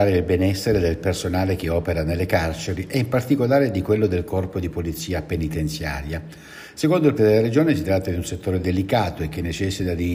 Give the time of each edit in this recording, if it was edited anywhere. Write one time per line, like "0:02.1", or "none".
0:07.2